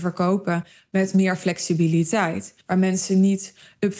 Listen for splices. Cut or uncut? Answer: cut